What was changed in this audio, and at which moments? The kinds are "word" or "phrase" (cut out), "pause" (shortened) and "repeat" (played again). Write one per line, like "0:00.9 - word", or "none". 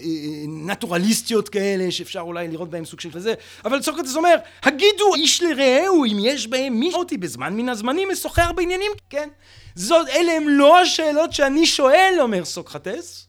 0:03.1 - word
0:05.1 - word
0:06.9 - word
0:09.0 - word